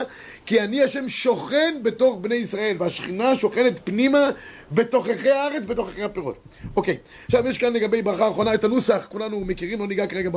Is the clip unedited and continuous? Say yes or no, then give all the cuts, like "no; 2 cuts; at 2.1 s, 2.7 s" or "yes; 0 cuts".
yes; 0 cuts